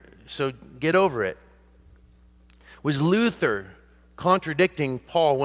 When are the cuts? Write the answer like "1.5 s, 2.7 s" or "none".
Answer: none